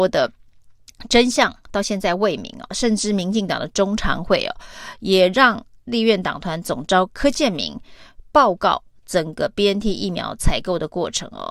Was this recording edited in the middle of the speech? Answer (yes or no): no